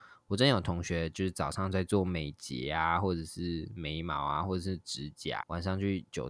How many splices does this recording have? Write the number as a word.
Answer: one